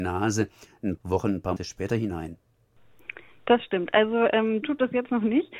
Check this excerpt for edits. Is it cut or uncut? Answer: cut